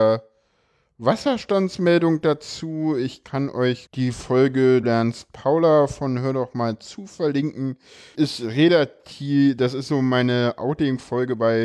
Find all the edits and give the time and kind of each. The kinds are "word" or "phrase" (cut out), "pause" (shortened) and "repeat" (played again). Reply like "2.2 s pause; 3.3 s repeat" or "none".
3.9 s word; 4.8 s word; 8.1 s word